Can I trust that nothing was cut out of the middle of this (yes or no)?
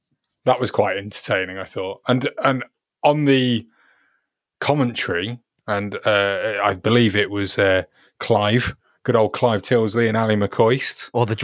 yes